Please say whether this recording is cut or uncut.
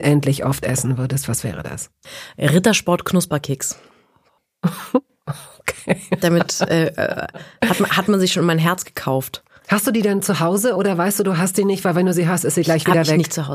uncut